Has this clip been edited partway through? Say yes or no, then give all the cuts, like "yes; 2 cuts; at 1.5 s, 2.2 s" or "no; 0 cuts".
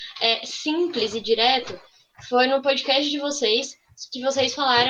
no; 0 cuts